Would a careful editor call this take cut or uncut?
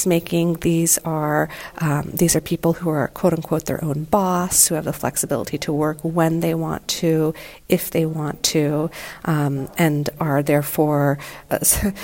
uncut